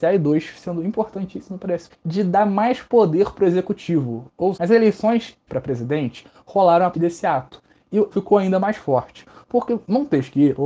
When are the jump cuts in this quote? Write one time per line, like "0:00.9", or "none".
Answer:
0:01.9
0:04.5
0:05.5
0:06.9
0:08.1